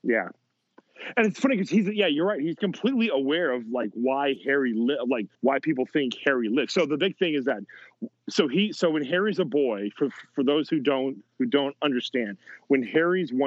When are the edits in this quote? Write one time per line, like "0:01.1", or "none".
0:05.3